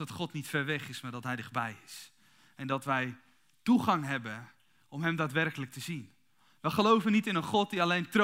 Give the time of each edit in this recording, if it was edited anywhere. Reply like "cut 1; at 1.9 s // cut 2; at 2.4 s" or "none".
none